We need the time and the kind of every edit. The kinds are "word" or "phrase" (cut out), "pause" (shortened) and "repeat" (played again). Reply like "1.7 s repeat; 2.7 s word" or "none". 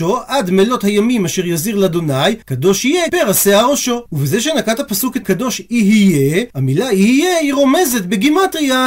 2.4 s pause; 3.1 s word; 4.1 s pause; 5.2 s word; 6.5 s pause